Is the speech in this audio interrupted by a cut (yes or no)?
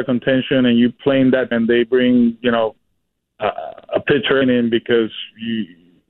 yes